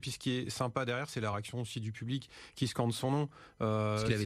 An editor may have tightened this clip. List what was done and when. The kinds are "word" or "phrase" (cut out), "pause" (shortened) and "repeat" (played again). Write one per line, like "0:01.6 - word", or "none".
none